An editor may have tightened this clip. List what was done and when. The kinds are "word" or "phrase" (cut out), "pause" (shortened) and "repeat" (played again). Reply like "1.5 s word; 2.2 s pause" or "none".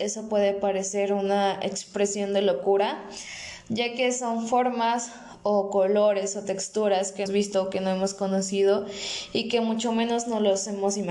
7.3 s phrase